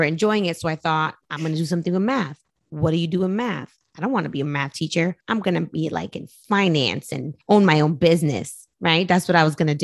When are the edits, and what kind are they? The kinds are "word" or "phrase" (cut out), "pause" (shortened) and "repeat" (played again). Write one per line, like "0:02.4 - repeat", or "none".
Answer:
0:01.2 - pause
0:05.2 - pause
0:07.4 - pause